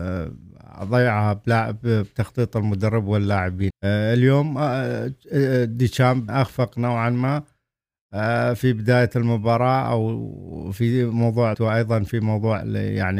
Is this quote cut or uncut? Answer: cut